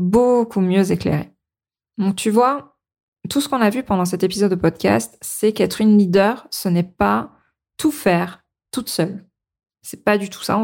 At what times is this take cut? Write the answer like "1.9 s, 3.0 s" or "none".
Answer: none